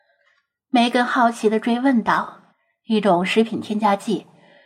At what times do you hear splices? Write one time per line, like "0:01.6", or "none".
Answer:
0:02.5